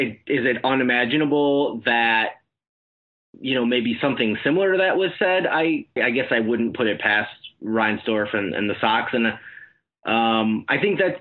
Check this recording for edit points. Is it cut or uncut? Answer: cut